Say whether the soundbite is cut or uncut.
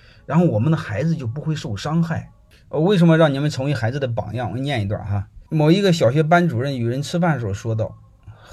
cut